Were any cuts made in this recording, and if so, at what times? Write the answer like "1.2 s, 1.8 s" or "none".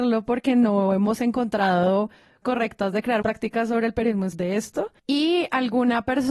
2.4 s, 3.2 s, 4.3 s, 5.0 s